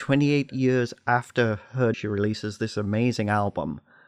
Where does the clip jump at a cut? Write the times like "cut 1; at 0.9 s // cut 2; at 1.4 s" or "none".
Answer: cut 1; at 1.9 s